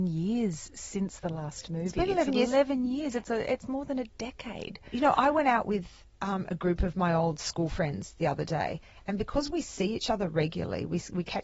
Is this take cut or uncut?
cut